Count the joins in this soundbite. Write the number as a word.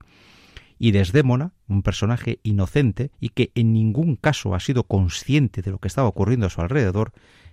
one